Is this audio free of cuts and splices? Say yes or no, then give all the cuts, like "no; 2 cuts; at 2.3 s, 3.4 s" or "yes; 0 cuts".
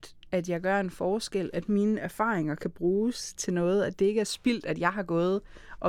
yes; 0 cuts